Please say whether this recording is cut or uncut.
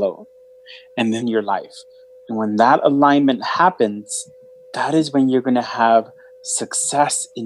cut